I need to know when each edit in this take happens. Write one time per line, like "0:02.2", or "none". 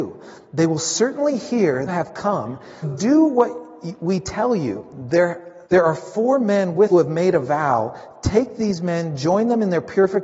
0:01.9
0:02.8
0:05.6
0:06.9